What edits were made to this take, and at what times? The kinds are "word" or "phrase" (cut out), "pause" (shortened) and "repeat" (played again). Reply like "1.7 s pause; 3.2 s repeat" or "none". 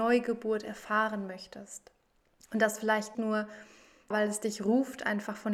2.2 s pause; 3.1 s word; 4.1 s word